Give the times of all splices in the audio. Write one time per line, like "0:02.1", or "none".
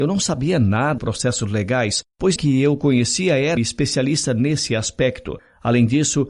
0:01.0
0:02.4
0:03.6